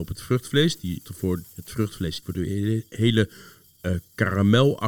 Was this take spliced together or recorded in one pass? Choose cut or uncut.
cut